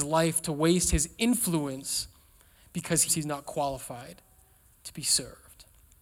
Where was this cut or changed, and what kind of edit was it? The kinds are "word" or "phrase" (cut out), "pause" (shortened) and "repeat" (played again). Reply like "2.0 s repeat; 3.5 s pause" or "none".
3.1 s word